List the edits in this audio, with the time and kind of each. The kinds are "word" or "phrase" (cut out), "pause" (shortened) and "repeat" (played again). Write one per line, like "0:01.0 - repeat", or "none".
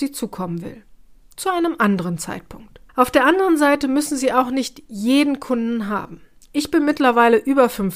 0:02.9 - pause
0:06.4 - pause